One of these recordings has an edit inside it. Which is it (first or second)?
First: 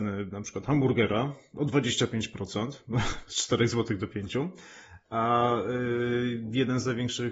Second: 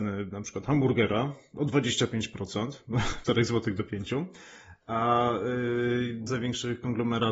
second